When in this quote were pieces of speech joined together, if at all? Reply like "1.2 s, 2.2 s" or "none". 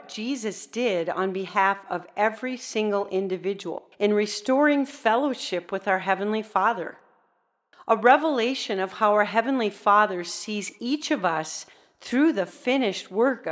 none